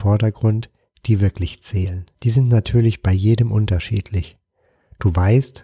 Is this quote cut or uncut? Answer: cut